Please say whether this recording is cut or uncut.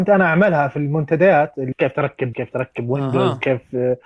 cut